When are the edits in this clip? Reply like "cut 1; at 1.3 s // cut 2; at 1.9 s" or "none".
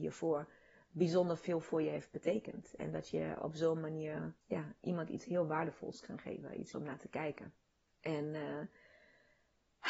cut 1; at 4.4 s // cut 2; at 6.7 s // cut 3; at 7.9 s